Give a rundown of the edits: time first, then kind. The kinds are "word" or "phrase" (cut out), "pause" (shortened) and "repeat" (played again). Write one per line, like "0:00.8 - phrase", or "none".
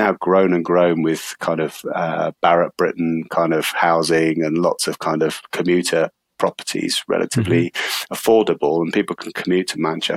none